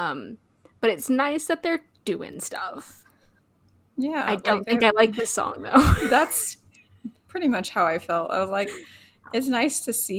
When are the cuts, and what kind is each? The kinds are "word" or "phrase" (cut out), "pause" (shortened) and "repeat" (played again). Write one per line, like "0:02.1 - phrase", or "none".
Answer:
0:03.4 - pause